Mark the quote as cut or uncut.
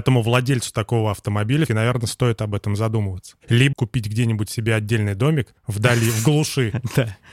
cut